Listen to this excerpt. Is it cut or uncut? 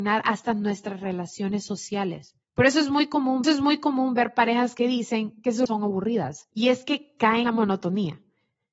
cut